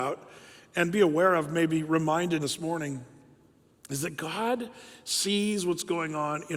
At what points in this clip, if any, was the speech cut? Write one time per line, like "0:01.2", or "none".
0:02.4